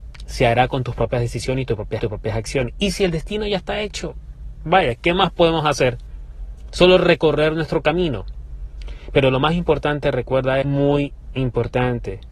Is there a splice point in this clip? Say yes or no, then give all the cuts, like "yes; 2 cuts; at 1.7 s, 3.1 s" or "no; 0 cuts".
yes; 2 cuts; at 2.0 s, 10.6 s